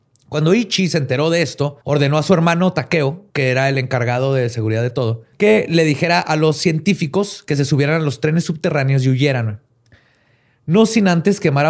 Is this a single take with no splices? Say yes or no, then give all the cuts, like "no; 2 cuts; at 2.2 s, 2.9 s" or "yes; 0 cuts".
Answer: no; 3 cuts; at 1.8 s, 3.3 s, 5.3 s